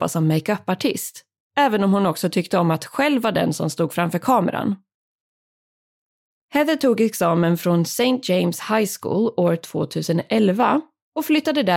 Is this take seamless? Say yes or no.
yes